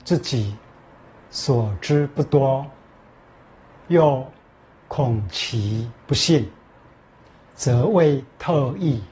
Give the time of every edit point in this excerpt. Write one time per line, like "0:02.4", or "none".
none

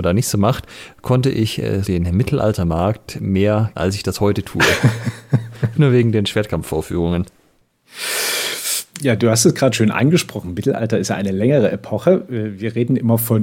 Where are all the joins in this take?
0:01.8
0:03.8
0:05.7
0:08.9
0:09.7

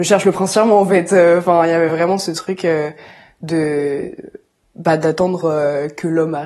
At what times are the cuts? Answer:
none

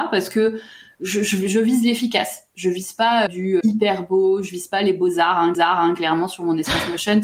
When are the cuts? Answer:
0:03.3
0:03.6
0:05.5

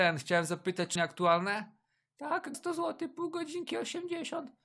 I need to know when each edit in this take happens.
0:01.0
0:02.5

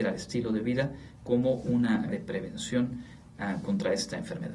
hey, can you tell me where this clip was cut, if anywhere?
0:02.1

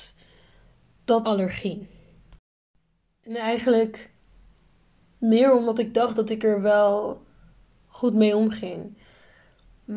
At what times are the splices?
0:01.2

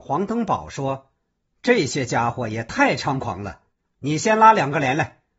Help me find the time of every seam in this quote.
none

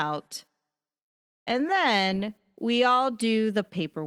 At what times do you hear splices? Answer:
none

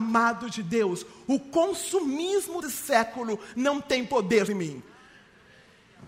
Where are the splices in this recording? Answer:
0:02.6
0:04.5

